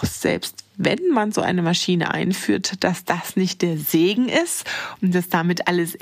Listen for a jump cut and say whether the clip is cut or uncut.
uncut